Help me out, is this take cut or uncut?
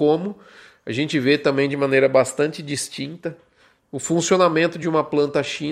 uncut